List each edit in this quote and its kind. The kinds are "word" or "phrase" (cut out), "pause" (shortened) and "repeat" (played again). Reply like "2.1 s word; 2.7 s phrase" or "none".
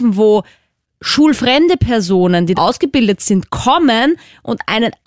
2.6 s word